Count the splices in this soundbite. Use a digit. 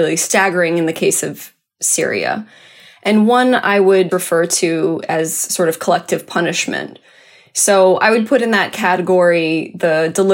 0